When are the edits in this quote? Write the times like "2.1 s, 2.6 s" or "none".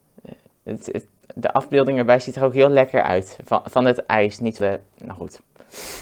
4.6 s